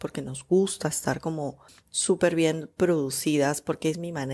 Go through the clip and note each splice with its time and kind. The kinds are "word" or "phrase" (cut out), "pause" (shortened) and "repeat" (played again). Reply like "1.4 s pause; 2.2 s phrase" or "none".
1.7 s pause